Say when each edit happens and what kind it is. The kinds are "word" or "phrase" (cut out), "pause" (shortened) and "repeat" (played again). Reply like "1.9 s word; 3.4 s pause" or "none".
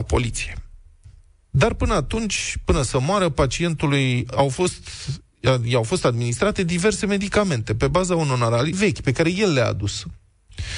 8.7 s phrase